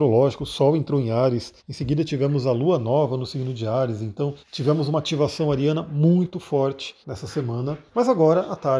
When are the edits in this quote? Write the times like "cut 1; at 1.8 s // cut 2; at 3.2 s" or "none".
cut 1; at 1.6 s // cut 2; at 4.4 s // cut 3; at 7.0 s // cut 4; at 7.9 s